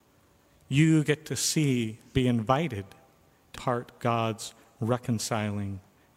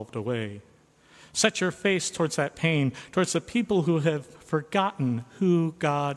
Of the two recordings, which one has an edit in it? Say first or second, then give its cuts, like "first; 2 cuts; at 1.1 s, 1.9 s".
first; 3 cuts; at 2.1 s, 3.5 s, 4.0 s